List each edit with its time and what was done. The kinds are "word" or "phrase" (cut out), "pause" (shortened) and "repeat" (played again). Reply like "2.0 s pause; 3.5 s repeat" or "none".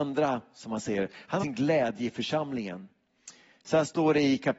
1.4 s word